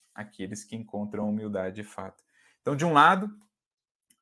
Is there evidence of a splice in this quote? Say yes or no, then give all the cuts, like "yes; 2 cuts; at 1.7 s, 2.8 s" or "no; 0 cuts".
no; 0 cuts